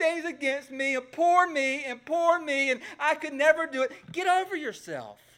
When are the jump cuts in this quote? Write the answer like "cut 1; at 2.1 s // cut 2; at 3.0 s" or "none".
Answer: none